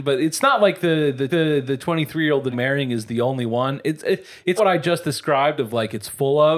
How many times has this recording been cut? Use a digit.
3